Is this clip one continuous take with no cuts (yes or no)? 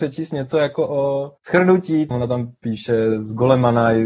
no